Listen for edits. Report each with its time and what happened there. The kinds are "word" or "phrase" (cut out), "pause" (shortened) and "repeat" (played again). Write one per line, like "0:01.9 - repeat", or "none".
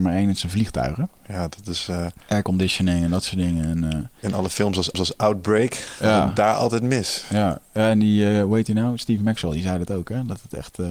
0:04.9 - repeat